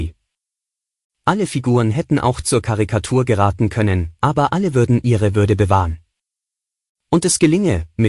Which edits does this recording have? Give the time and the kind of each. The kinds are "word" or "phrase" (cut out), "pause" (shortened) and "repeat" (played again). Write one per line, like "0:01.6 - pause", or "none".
none